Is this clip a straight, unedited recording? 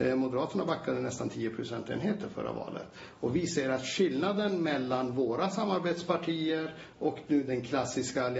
yes; 0 cuts

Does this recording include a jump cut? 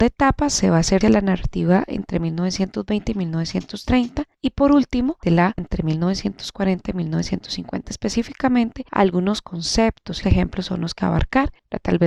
yes; 6 cuts; at 1.0 s, 4.3 s, 5.2 s, 5.6 s, 10.2 s, 11.0 s

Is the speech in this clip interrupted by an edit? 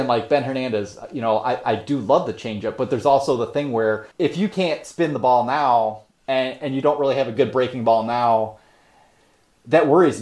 yes; 1 cut; at 4.1 s

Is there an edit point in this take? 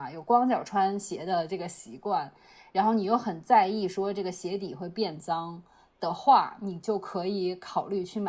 no; 0 cuts

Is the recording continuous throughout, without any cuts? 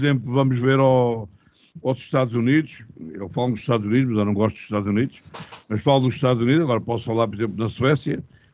yes; 0 cuts

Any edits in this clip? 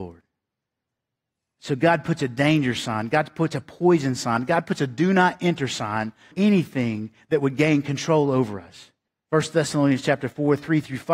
yes; 2 cuts; at 6.3 s, 9.1 s

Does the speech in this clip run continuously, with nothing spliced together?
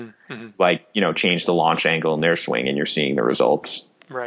yes; 0 cuts

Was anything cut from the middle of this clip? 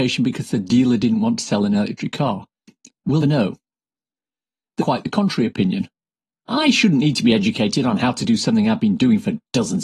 yes; 2 cuts; at 3.2 s, 4.8 s

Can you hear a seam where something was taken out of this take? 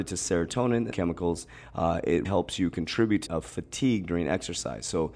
yes; 3 cuts; at 0.9 s, 2.2 s, 3.3 s

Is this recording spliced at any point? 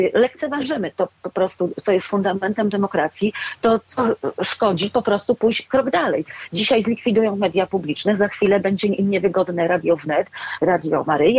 no; 0 cuts

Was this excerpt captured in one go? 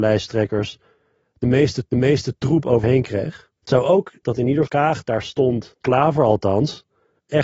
no; 6 cuts; at 1.9 s, 2.8 s, 3.6 s, 4.2 s, 4.7 s, 5.8 s

